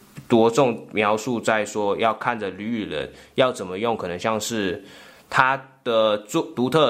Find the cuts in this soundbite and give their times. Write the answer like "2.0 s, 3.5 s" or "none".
none